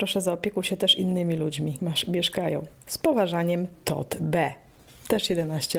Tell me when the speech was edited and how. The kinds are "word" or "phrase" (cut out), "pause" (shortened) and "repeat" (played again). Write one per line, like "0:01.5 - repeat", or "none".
0:01.8 - word